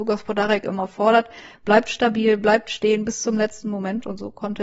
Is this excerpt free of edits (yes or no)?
yes